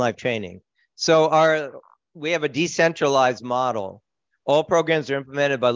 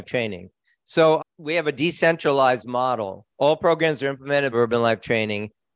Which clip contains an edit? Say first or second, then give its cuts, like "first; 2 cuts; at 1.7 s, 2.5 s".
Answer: second; 3 cuts; at 1.2 s, 3.3 s, 4.5 s